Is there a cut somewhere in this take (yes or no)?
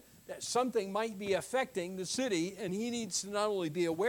no